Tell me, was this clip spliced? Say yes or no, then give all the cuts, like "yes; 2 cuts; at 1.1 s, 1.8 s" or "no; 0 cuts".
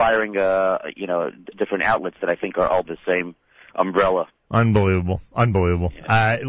yes; 2 cuts; at 1.5 s, 2.8 s